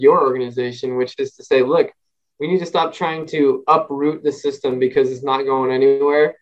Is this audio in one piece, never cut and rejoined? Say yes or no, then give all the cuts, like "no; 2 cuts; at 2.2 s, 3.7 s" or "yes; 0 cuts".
yes; 0 cuts